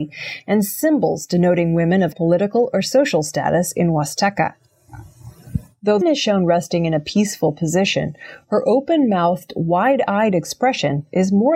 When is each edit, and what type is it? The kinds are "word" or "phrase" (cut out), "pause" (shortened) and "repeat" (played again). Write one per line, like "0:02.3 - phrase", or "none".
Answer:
0:02.1 - word
0:06.0 - word